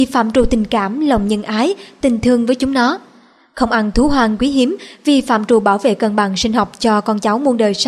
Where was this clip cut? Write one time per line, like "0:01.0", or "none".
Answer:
none